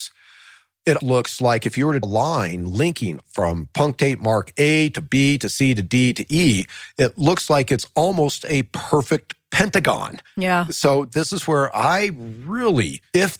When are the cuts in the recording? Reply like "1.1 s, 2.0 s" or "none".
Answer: 1.0 s, 2.0 s